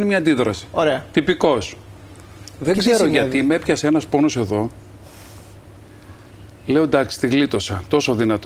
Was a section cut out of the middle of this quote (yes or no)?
no